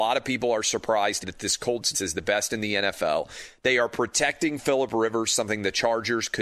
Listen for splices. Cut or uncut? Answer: cut